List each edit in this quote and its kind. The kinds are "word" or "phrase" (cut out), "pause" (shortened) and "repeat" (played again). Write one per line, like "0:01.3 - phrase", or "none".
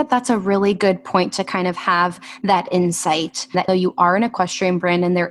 0:03.7 - word